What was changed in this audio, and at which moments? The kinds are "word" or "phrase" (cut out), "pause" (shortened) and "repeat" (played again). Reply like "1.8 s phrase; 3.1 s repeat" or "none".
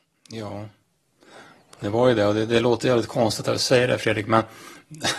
none